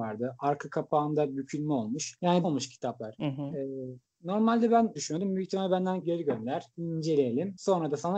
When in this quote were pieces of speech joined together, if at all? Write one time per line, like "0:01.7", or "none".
0:02.4
0:05.0
0:06.0